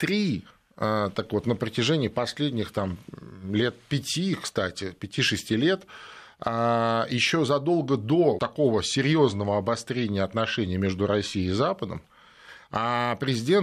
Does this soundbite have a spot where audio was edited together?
yes; 1 cut; at 8.4 s

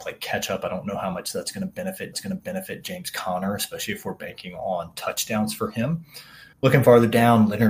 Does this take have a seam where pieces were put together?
yes; 2 cuts; at 2.1 s, 6.5 s

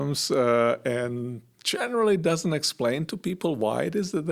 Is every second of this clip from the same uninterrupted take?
yes; 0 cuts

